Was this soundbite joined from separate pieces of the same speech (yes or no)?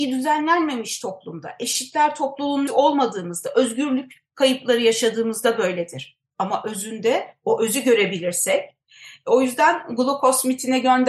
yes